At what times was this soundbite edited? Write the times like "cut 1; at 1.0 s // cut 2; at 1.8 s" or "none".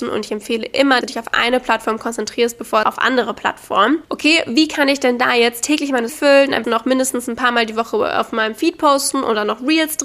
cut 1; at 1.0 s // cut 2; at 2.8 s // cut 3; at 6.1 s // cut 4; at 6.6 s